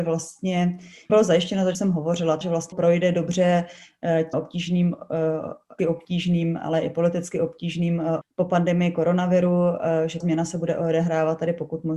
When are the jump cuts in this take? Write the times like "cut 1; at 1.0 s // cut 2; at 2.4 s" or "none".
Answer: cut 1; at 1.1 s // cut 2; at 1.7 s // cut 3; at 2.4 s // cut 4; at 2.7 s // cut 5; at 4.3 s // cut 6; at 5.8 s // cut 7; at 8.2 s // cut 8; at 10.2 s

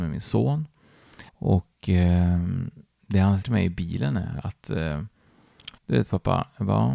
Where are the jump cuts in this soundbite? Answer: cut 1; at 1.3 s // cut 2; at 3.4 s // cut 3; at 5.8 s

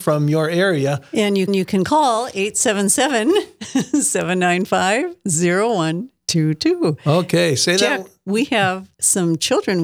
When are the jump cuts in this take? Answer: cut 1; at 1.5 s // cut 2; at 8.9 s

